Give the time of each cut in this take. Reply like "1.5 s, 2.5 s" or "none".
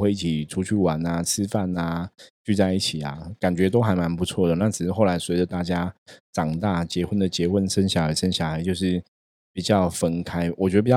none